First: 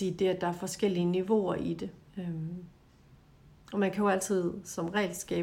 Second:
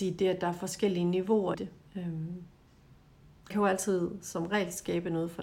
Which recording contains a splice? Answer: second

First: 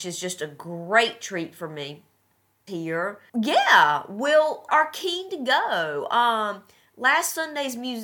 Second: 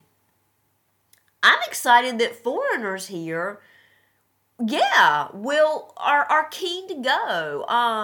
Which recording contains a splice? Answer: first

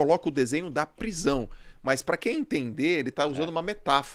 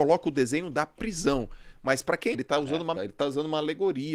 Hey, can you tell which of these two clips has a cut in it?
second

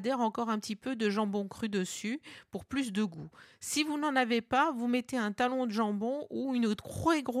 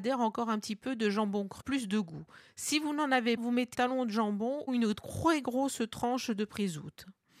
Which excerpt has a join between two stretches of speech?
second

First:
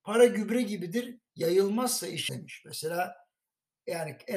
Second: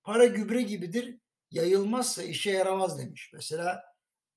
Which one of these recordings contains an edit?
first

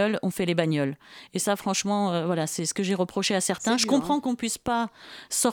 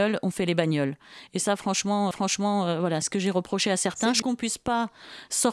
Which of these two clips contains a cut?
second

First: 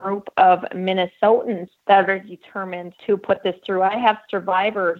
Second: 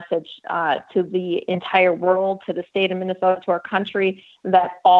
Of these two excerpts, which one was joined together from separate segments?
first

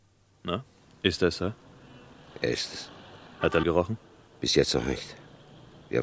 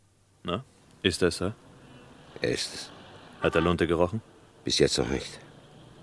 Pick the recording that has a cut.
first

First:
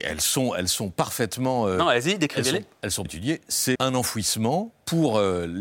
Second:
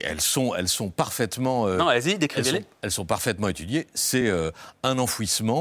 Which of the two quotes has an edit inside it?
first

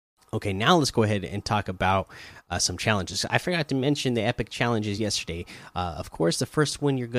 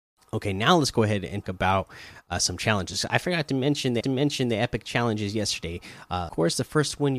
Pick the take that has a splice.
second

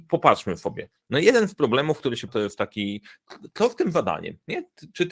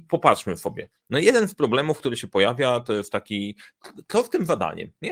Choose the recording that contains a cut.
first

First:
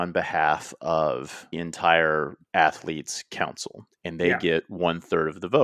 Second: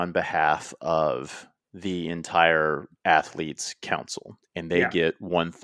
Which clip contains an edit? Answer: first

